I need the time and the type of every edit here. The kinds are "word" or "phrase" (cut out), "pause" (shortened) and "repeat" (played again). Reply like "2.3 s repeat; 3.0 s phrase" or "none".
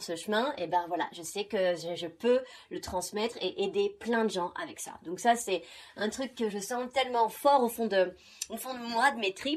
none